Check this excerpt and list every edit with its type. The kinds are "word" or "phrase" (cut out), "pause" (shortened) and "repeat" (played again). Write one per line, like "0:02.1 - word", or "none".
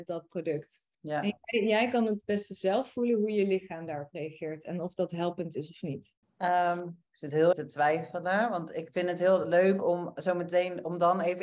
0:00.9 - pause
0:07.5 - word